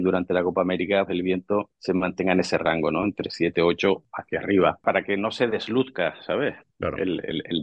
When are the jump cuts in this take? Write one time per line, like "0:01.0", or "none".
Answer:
0:01.1